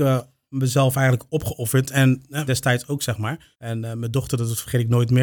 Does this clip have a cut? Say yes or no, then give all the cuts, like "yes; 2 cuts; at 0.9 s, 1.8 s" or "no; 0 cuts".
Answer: yes; 2 cuts; at 2.5 s, 3.5 s